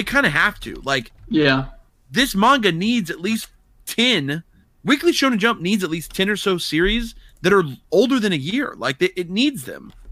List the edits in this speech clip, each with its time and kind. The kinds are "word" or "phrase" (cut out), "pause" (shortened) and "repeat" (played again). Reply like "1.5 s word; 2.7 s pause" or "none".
1.2 s pause